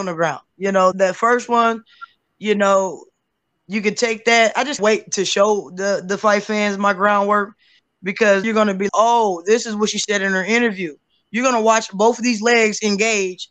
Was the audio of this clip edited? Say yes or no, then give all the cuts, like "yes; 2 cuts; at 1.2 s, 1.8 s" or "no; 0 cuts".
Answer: yes; 4 cuts; at 0.9 s, 4.8 s, 8.4 s, 8.9 s